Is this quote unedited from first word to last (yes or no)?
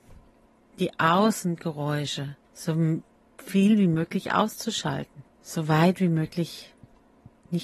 no